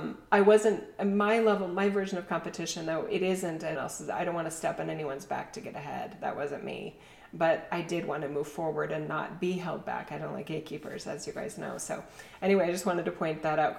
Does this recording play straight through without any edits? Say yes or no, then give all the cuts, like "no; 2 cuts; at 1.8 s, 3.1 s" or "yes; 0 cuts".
no; 1 cut; at 3.8 s